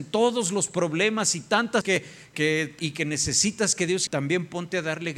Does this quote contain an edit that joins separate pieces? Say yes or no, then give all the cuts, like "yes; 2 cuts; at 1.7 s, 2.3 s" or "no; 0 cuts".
yes; 4 cuts; at 1.8 s, 2.3 s, 2.8 s, 4.1 s